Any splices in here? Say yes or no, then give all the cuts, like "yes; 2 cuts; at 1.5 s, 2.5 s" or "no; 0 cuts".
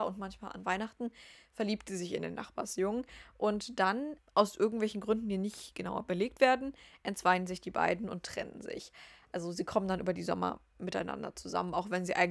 no; 0 cuts